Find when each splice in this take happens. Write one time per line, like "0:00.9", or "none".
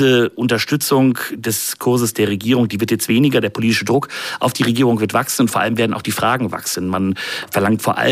none